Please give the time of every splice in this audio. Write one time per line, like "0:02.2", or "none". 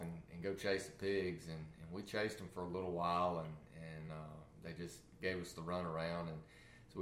none